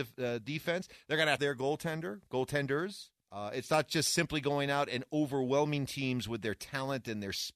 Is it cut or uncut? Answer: cut